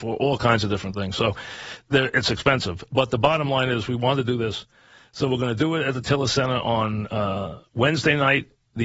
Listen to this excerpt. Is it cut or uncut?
uncut